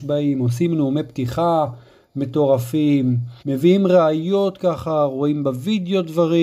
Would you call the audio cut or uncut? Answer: cut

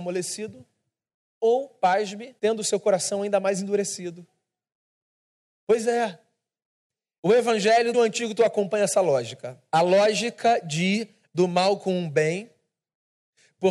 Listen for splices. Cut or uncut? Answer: cut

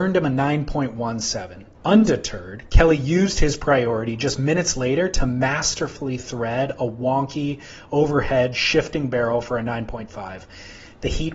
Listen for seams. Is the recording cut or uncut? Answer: cut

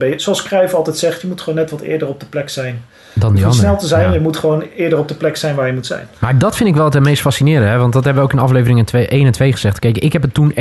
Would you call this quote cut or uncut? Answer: uncut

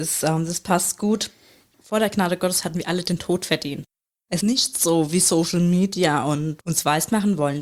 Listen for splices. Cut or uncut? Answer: cut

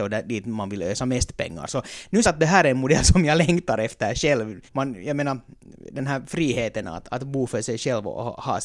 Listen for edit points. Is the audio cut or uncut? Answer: cut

